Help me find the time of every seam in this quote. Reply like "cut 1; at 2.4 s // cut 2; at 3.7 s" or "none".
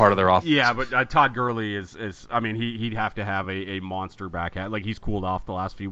none

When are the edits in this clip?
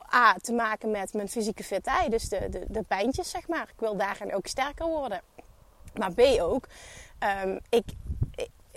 none

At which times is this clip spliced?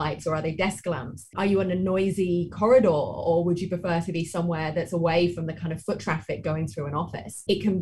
none

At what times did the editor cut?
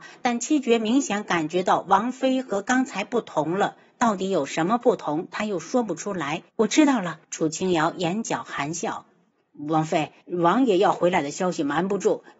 cut 1; at 6.5 s // cut 2; at 7.2 s // cut 3; at 10.2 s

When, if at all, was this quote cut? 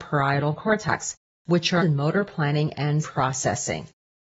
cut 1; at 1.3 s // cut 2; at 1.8 s // cut 3; at 3.0 s

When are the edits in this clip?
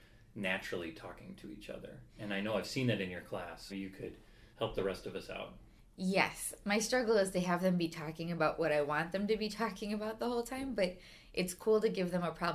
cut 1; at 3.7 s // cut 2; at 4.5 s // cut 3; at 5.8 s

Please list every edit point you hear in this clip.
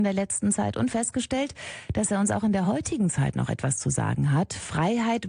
none

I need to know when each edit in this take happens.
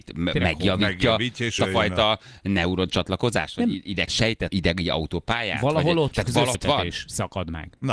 cut 1; at 1.6 s // cut 2; at 4.1 s // cut 3; at 4.5 s // cut 4; at 6.1 s // cut 5; at 6.5 s

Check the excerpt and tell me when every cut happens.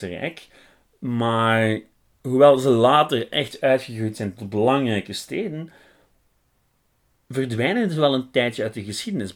none

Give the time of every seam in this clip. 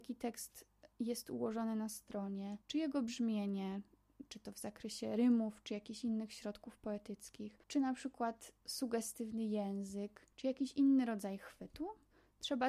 cut 1; at 0.9 s // cut 2; at 2.6 s // cut 3; at 7.6 s // cut 4; at 8.6 s // cut 5; at 10.3 s

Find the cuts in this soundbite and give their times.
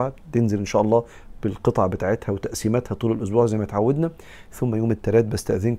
none

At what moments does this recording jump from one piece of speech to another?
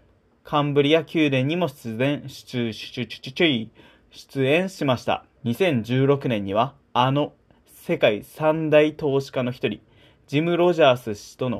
cut 1; at 5.4 s

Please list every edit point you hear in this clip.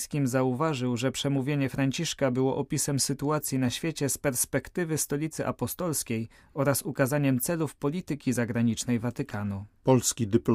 none

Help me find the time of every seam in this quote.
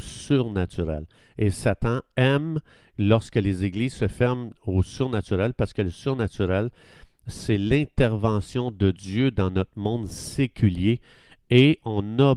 none

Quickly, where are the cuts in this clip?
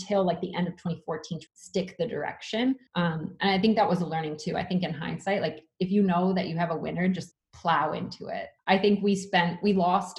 cut 1; at 1.5 s // cut 2; at 2.9 s // cut 3; at 7.3 s // cut 4; at 8.6 s

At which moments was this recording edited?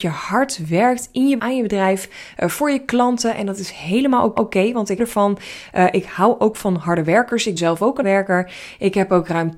cut 1; at 1.4 s // cut 2; at 4.4 s // cut 3; at 5.0 s // cut 4; at 7.6 s // cut 5; at 8.0 s

